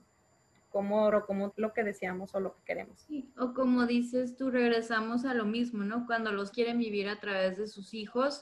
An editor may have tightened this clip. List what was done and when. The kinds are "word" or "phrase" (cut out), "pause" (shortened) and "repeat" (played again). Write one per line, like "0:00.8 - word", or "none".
0:01.1 - word
0:01.5 - word
0:06.5 - word